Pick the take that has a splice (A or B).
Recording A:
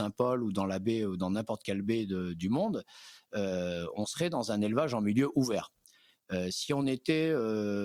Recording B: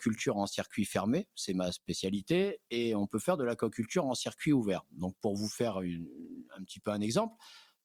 B